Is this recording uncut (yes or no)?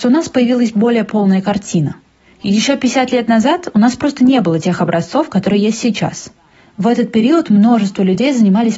yes